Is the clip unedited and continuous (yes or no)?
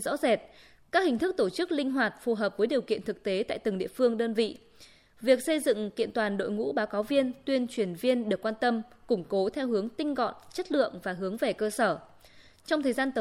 yes